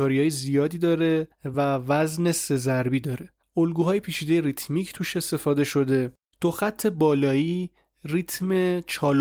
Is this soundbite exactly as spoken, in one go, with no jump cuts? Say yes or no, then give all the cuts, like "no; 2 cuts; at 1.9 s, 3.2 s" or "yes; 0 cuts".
yes; 0 cuts